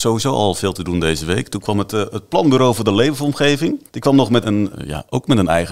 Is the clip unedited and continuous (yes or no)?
no